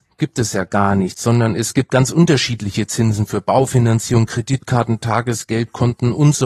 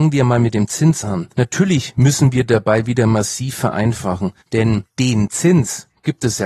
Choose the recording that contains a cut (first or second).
second